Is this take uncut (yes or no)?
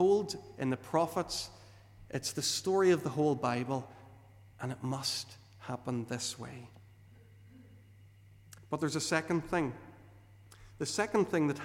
yes